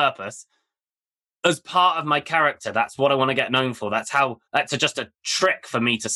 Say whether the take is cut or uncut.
cut